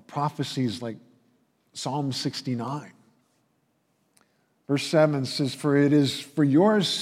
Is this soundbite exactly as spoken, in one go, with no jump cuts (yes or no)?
yes